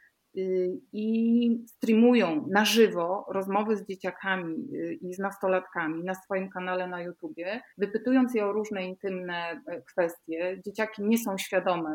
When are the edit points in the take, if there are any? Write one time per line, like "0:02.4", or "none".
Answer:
0:07.7